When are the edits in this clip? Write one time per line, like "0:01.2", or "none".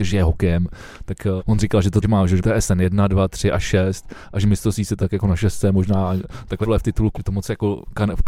0:01.4
0:02.0
0:02.4
0:05.0
0:06.6
0:07.1